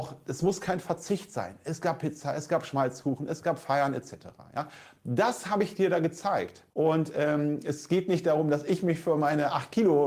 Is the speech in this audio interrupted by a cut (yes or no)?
yes